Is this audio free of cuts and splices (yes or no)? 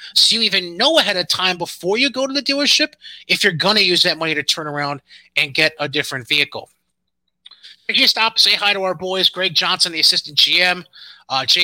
yes